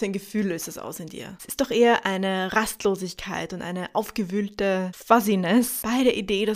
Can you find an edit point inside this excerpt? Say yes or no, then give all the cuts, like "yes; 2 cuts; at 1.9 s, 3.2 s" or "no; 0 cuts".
no; 0 cuts